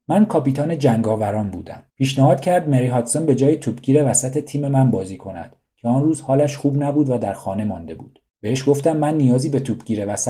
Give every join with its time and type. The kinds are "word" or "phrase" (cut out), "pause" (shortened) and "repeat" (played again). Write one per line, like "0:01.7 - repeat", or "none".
0:01.9 - pause
0:08.3 - pause

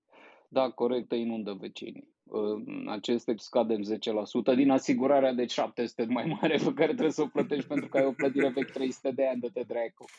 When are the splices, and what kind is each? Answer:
0:01.0 - word
0:02.1 - pause
0:03.4 - word
0:06.1 - word
0:08.7 - word

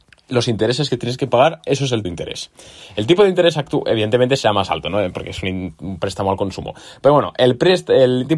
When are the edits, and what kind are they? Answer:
0:02.0 - word

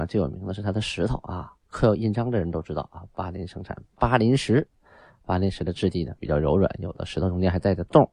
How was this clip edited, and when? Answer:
0:01.6 - pause

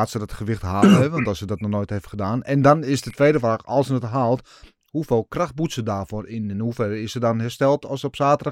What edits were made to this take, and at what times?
none

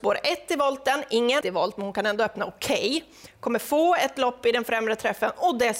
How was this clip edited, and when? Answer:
0:01.4 - word

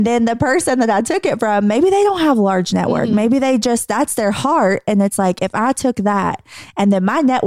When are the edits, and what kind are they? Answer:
none

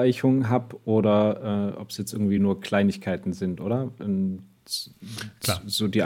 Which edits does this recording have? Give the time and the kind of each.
none

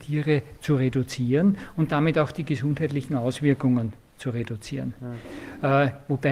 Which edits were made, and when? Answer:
none

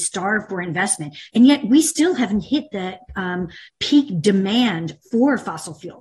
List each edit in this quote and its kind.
0:03.7 - pause

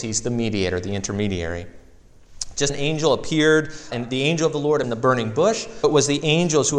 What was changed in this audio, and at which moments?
0:02.7 - word
0:03.9 - word
0:04.8 - phrase
0:05.8 - word

